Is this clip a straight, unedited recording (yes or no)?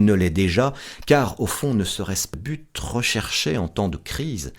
no